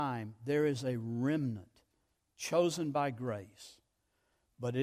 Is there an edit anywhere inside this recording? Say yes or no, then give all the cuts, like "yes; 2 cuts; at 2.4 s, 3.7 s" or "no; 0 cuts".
no; 0 cuts